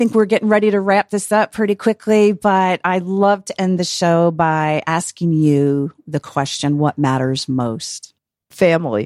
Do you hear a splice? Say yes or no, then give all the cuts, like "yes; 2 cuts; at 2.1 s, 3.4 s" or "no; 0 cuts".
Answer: no; 0 cuts